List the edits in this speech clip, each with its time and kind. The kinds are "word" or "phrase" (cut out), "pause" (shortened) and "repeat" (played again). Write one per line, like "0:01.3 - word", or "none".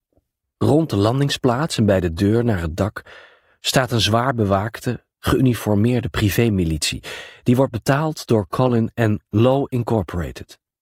none